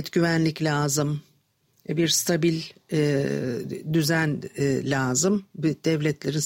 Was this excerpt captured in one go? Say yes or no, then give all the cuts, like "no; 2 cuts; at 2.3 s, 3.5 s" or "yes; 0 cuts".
yes; 0 cuts